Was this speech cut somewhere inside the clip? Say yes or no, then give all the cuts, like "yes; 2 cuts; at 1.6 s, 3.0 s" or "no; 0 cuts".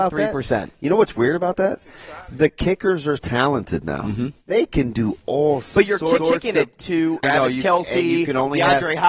yes; 3 cuts; at 3.2 s, 6.2 s, 7.2 s